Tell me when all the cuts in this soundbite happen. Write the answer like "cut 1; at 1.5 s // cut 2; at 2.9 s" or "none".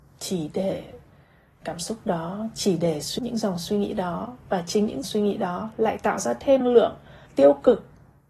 cut 1; at 1.6 s // cut 2; at 3.2 s // cut 3; at 5.0 s // cut 4; at 6.6 s // cut 5; at 7.3 s